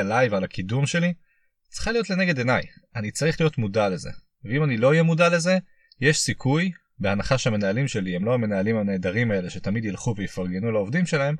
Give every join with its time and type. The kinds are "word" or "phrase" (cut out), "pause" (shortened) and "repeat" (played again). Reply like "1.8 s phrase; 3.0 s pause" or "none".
none